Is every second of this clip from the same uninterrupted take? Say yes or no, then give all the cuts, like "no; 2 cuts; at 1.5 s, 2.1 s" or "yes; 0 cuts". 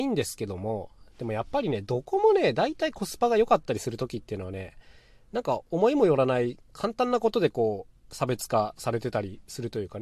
yes; 0 cuts